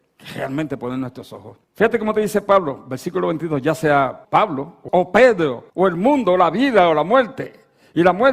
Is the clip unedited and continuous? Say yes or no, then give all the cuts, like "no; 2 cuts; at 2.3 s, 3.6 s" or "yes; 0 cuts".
no; 4 cuts; at 1.6 s, 4.2 s, 4.9 s, 5.7 s